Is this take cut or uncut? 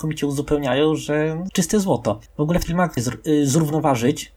cut